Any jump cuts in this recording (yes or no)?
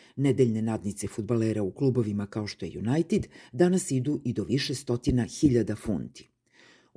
no